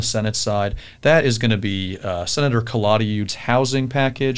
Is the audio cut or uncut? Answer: uncut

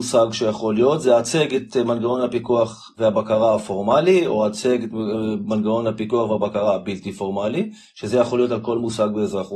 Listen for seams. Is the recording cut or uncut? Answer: uncut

